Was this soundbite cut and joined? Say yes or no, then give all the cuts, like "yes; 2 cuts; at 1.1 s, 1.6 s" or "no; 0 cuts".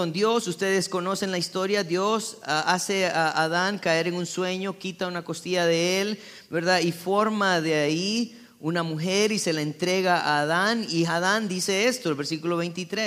no; 0 cuts